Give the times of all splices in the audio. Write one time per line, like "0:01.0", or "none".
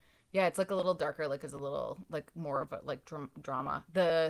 none

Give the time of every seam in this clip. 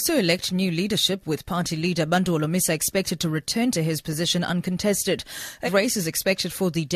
0:05.7

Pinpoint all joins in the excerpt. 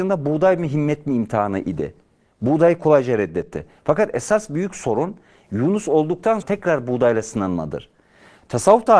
0:06.4

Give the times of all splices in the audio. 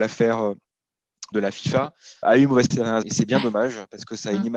0:01.3
0:02.2
0:02.7
0:03.0

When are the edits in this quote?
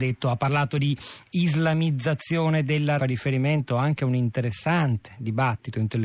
0:03.0

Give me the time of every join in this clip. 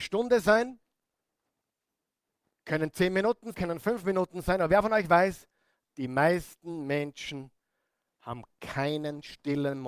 0:03.5

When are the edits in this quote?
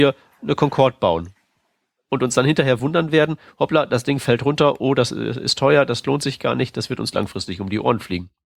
none

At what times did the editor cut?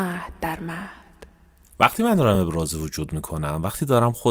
none

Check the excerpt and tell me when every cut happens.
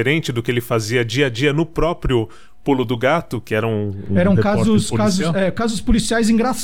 none

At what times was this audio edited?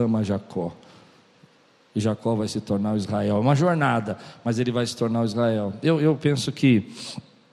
none

